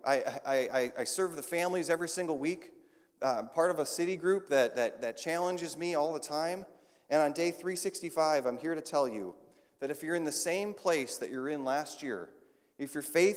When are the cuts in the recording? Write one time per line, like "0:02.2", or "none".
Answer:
none

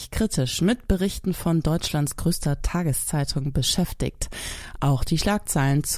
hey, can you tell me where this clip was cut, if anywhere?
none

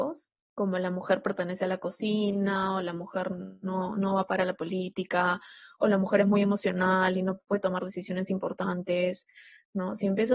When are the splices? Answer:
none

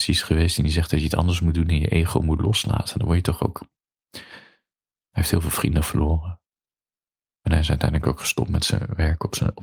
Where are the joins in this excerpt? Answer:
none

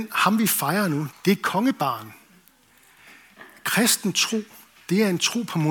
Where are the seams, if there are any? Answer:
0:01.1

